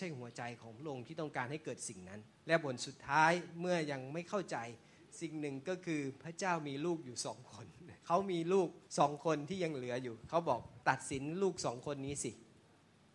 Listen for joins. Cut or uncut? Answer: cut